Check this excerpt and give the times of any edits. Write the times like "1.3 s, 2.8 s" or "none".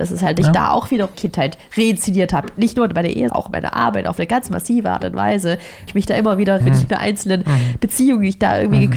1.1 s, 3.3 s, 5.9 s, 6.6 s